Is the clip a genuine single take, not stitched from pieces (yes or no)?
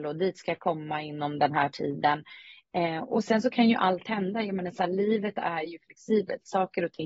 yes